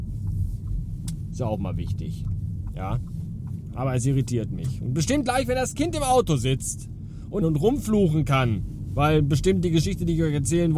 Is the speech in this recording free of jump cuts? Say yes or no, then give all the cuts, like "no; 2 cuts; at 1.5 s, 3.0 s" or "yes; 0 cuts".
no; 1 cut; at 7.4 s